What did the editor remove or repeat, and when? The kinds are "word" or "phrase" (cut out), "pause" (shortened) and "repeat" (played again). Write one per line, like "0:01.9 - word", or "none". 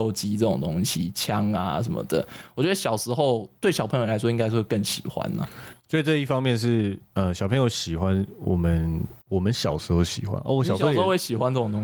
0:09.2 - pause